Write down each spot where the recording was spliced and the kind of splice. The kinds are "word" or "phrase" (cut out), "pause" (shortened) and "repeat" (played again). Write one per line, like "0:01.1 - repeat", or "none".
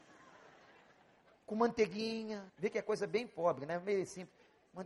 0:02.5 - pause

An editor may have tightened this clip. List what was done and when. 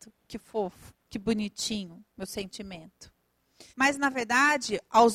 0:01.0 - pause
0:02.1 - pause
0:03.7 - pause

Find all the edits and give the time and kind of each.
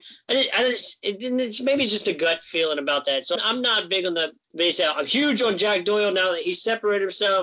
0:03.3 - word
0:04.4 - word

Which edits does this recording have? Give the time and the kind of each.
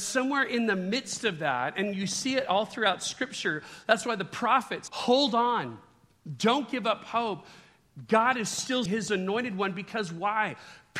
0:04.9 - phrase
0:08.9 - word

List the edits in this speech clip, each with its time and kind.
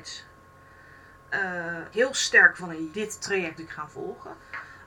0:01.9 - word
0:02.6 - word
0:02.9 - word
0:03.6 - word

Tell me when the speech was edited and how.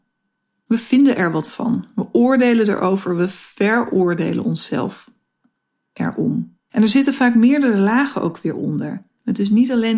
0:06.6 - pause

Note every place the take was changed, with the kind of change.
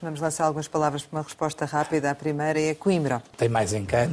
none

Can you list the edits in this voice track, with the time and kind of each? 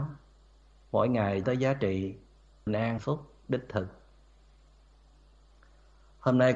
0:01.4 - word
0:02.7 - word
0:03.0 - word

